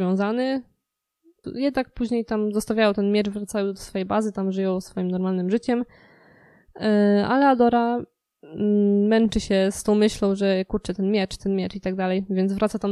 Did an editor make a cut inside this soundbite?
no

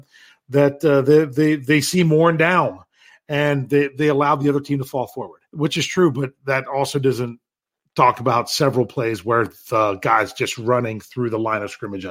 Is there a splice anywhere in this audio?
yes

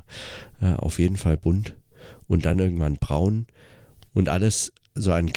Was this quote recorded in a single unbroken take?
yes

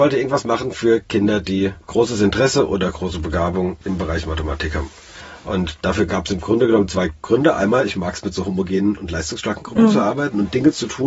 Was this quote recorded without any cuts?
yes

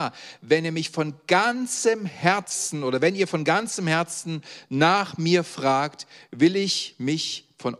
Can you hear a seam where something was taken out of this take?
no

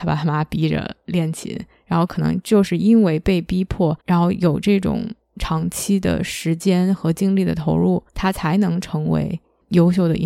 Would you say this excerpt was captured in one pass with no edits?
no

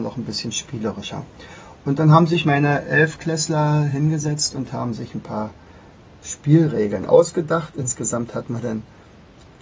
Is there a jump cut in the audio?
no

